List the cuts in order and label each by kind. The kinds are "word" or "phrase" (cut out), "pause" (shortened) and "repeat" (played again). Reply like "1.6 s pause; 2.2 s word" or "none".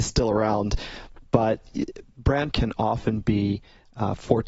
2.5 s word